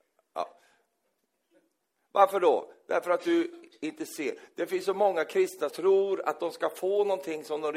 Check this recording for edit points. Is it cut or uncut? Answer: cut